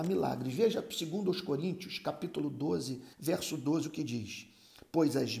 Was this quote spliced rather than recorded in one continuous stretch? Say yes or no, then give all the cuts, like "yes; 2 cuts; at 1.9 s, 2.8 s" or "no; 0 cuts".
yes; 1 cut; at 3.1 s